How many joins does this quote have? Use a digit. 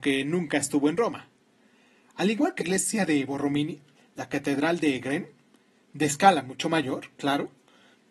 1